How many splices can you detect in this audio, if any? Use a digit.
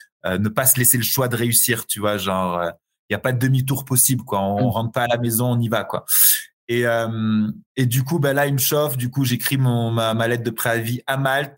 1